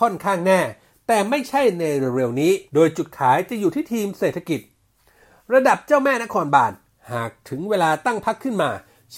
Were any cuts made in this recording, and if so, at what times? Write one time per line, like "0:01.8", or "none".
0:02.7